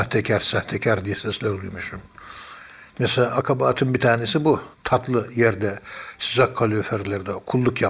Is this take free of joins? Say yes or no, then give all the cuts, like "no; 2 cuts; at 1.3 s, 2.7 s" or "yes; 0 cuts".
no; 2 cuts; at 2.9 s, 4.7 s